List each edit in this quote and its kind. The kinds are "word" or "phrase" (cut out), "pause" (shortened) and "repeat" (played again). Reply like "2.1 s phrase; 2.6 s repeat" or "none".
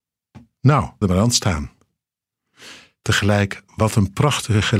1.0 s word; 3.7 s pause